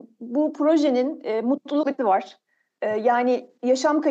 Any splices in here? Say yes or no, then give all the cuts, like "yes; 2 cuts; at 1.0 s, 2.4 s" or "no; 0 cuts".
yes; 1 cut; at 2.0 s